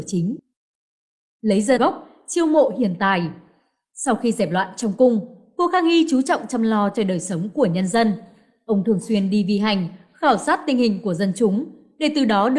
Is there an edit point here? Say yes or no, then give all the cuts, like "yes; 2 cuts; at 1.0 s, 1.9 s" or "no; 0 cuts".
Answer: yes; 1 cut; at 1.8 s